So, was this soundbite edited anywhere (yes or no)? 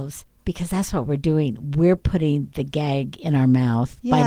no